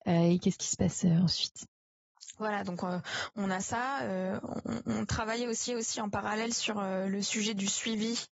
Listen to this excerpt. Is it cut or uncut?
cut